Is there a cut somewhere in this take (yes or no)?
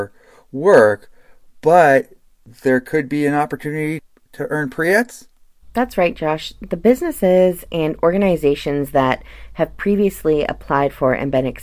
no